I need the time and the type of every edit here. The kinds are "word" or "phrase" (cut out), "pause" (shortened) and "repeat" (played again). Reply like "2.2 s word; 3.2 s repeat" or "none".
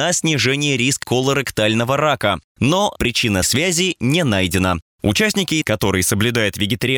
1.0 s word; 2.9 s word; 3.4 s word; 5.6 s word

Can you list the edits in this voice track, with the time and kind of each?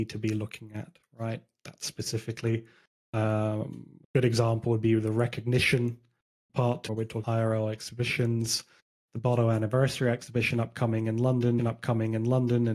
4.0 s pause; 6.5 s word; 6.9 s phrase; 7.2 s word; 11.6 s repeat

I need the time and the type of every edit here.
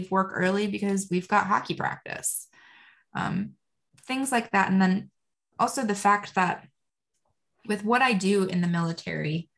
none

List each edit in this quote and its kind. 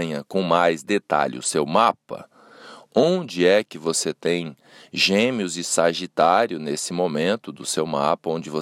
none

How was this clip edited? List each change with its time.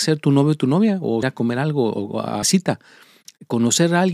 1.2 s word; 2.4 s word

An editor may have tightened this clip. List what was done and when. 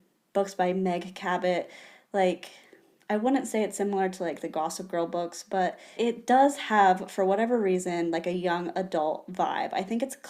6.0 s word

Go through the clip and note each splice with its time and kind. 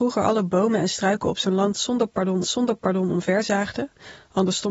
2.4 s repeat

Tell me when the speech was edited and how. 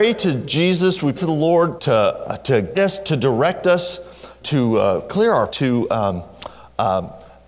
1.1 s word; 1.8 s word; 2.7 s word; 4.4 s word; 5.5 s word

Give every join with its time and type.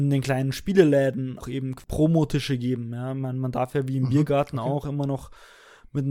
1.4 s word

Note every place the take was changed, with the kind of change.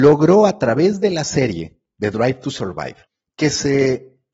3.1 s pause

